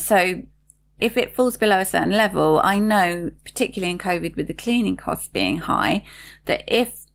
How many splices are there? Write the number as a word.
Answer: zero